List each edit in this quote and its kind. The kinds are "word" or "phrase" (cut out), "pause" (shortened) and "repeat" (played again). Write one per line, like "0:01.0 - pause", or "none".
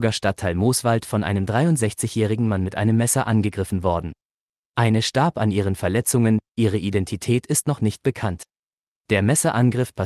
none